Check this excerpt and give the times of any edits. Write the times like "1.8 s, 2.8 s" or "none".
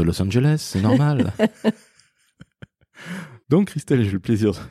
3.4 s